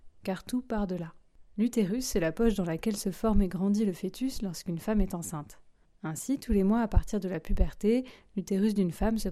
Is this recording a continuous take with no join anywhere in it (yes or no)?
yes